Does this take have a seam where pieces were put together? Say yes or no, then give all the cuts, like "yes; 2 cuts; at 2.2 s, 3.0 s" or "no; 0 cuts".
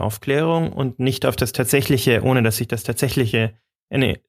no; 0 cuts